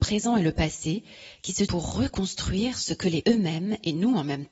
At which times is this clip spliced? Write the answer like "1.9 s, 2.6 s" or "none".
1.7 s, 3.2 s